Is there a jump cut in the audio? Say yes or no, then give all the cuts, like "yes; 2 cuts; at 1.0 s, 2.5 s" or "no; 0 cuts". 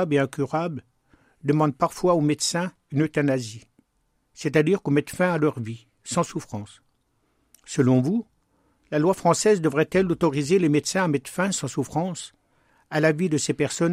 no; 0 cuts